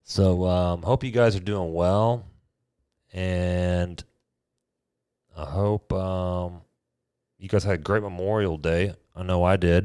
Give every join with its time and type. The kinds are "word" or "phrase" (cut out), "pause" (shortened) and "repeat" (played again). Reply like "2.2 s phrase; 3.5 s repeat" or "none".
none